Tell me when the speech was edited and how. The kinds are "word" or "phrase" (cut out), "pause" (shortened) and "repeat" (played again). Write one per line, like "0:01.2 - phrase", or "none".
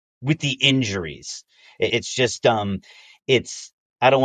0:01.9 - word